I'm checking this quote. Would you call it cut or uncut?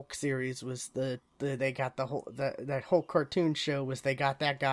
cut